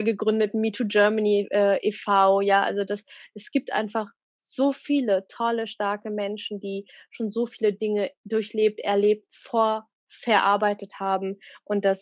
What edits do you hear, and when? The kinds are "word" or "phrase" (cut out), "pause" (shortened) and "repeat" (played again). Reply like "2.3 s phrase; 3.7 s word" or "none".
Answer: none